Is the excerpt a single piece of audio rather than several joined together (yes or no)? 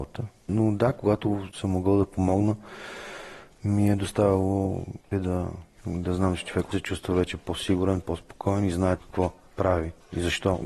no